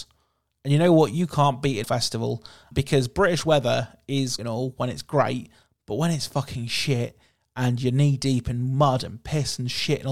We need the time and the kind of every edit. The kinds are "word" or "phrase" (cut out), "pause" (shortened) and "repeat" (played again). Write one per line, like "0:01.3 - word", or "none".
0:01.8 - word
0:02.7 - word
0:04.4 - word